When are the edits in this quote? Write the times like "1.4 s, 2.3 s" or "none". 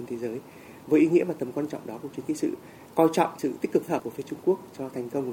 2.3 s, 3.9 s